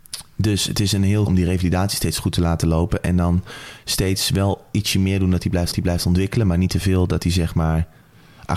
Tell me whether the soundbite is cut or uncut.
cut